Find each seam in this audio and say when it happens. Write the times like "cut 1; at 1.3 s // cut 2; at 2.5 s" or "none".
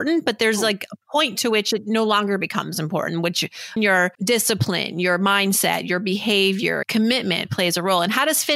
cut 1; at 3.8 s // cut 2; at 4.1 s // cut 3; at 6.8 s // cut 4; at 7.4 s